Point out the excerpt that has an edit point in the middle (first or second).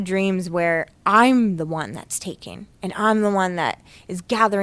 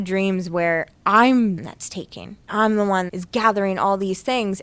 second